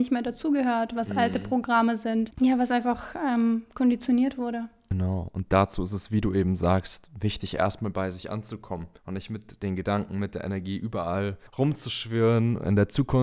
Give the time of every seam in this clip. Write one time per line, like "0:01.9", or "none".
0:09.0
0:11.5

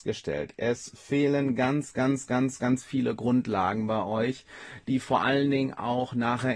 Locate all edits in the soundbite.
none

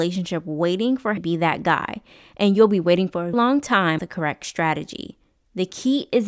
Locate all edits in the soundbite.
0:01.2
0:03.3
0:04.0

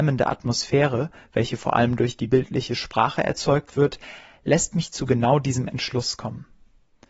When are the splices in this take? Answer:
none

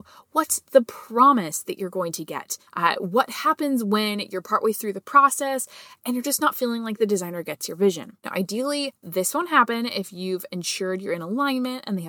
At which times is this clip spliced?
0:02.7
0:08.2

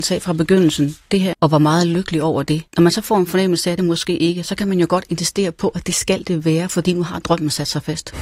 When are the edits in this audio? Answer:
0:01.3
0:02.7
0:03.8

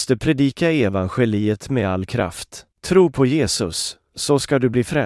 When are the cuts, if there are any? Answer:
0:02.7

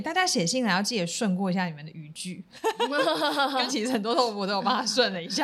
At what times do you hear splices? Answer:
0:03.7

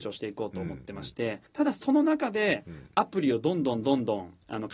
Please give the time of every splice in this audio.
0:01.5

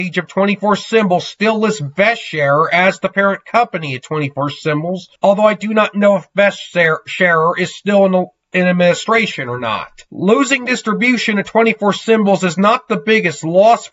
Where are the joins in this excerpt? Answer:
0:05.2
0:10.1

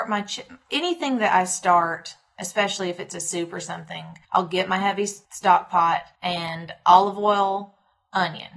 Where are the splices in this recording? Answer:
0:04.2
0:05.2
0:06.1

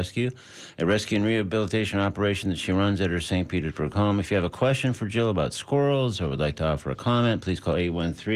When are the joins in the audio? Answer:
none

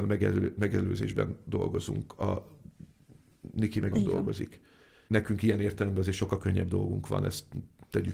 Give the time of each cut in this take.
0:03.9
0:05.1

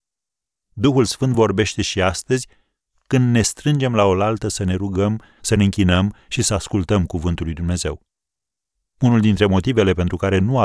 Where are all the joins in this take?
none

